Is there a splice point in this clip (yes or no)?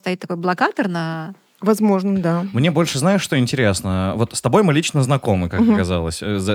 no